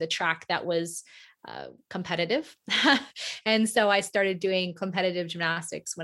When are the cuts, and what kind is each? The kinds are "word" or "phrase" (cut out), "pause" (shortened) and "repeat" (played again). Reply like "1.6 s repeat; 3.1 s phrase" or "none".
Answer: none